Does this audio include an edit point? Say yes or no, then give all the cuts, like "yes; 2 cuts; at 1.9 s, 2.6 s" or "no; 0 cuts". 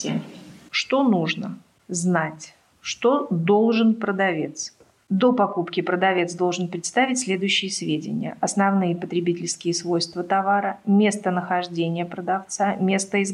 yes; 1 cut; at 2.7 s